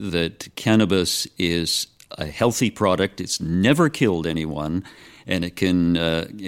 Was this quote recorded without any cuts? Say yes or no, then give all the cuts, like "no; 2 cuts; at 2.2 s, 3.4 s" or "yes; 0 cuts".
yes; 0 cuts